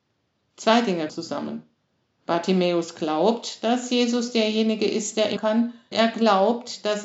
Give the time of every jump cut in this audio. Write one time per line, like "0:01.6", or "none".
0:01.1
0:05.4
0:05.9